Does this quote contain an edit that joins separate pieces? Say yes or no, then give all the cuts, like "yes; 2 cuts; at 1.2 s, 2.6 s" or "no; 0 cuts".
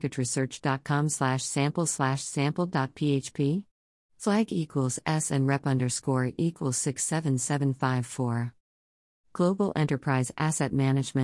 no; 0 cuts